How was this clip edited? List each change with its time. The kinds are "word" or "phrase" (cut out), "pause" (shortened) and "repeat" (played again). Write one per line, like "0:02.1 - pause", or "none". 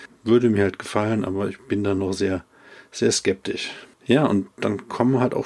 0:03.9 - pause